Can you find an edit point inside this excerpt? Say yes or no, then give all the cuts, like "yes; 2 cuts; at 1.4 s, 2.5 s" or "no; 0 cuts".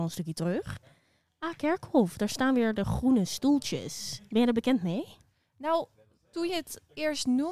no; 0 cuts